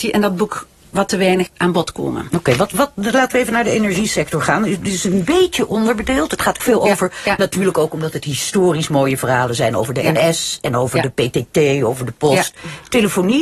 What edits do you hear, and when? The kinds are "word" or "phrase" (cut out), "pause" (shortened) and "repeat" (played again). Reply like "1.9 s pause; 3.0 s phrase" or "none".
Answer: 1.5 s word; 6.6 s word